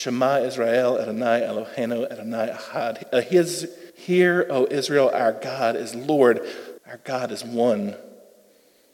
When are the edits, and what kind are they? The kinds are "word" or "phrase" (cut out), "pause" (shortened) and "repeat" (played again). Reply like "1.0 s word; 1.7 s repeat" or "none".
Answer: 3.9 s pause; 6.8 s pause